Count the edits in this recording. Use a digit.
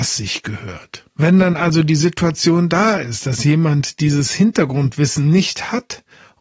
1